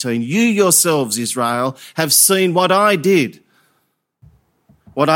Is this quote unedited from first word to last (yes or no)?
yes